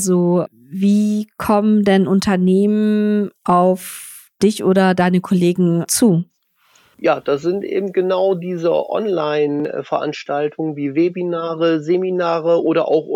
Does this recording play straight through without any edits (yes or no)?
yes